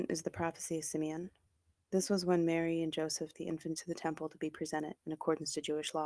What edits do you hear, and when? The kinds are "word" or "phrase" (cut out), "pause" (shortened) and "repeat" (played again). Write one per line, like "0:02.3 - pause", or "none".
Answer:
0:03.3 - word
0:03.8 - word

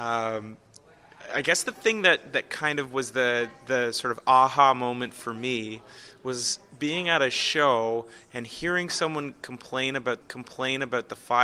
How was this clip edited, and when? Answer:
0:10.2 - repeat

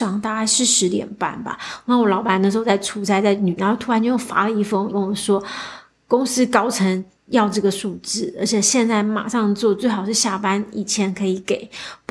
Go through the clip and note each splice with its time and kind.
0:03.6 - word
0:04.9 - word

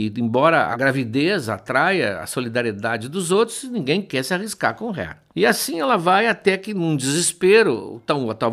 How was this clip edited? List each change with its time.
0:05.3 - pause

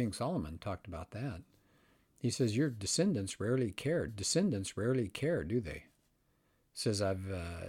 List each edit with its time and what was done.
0:04.1 - repeat

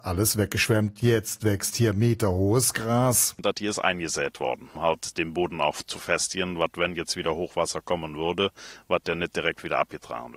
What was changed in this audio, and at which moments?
0:04.8 - word

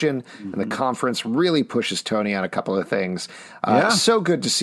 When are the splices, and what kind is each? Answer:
none

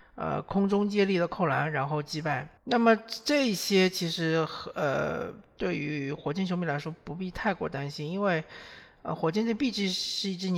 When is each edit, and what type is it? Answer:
0:02.6 - pause

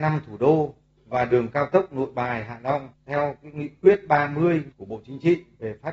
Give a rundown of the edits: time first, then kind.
0:02.9 - pause
0:04.7 - pause

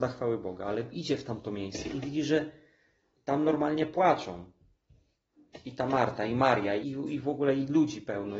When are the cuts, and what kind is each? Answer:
0:06.8 - word

